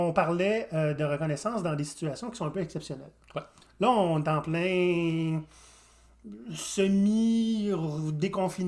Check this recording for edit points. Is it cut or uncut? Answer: uncut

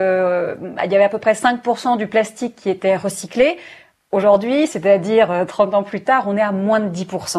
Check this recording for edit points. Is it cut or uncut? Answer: uncut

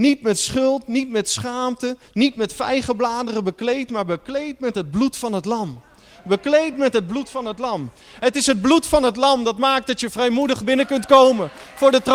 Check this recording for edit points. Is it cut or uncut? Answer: uncut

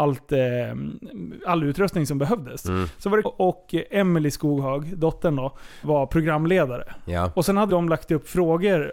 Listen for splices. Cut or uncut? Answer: cut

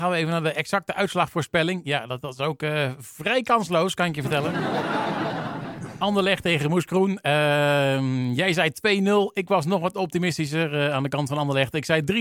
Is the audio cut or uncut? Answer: uncut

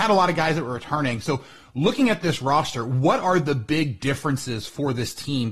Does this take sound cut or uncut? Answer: uncut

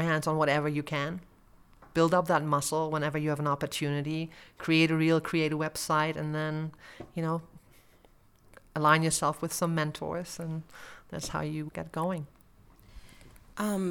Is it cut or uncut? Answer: cut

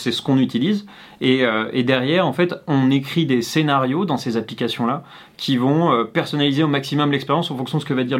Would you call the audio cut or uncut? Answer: uncut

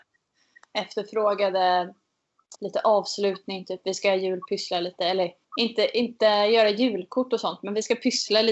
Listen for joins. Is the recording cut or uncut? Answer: cut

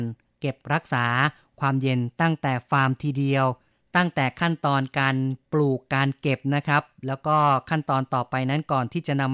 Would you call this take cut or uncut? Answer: uncut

